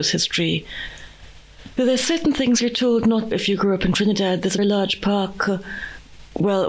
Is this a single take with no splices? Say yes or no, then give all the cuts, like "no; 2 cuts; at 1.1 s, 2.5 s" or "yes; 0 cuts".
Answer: no; 2 cuts; at 3.3 s, 4.6 s